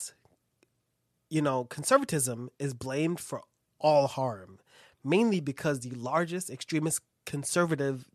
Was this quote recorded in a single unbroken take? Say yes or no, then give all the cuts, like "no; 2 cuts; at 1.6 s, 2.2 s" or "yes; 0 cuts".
yes; 0 cuts